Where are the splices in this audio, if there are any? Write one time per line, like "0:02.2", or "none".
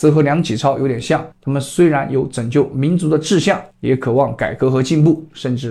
0:01.3
0:03.7